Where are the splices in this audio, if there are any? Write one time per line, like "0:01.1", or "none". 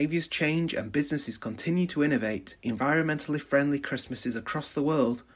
0:02.6